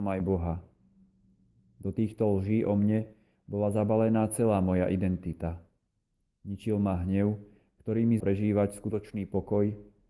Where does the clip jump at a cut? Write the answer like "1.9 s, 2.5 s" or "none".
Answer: 8.2 s